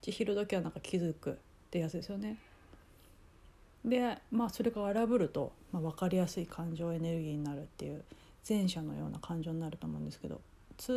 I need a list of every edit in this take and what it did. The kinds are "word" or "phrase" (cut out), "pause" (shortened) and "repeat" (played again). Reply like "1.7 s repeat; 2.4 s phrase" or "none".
none

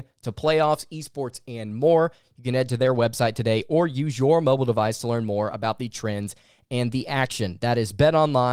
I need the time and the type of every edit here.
none

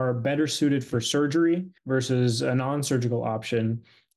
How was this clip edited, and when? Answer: 1.8 s pause

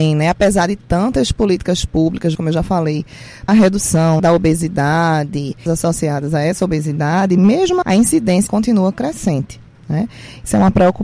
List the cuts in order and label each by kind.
2.3 s word; 3.5 s word; 4.2 s word; 5.7 s phrase; 7.8 s word; 8.5 s phrase

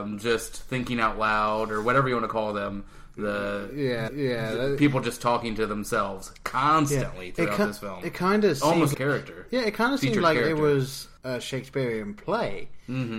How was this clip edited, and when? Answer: 4.1 s repeat; 8.9 s word; 11.2 s pause

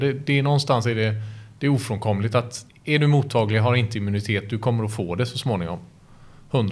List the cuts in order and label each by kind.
2.7 s pause

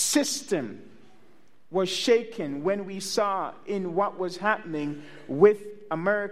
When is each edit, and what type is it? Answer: none

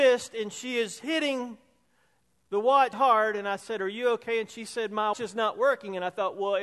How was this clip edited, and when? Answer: 2.9 s word; 5.1 s word

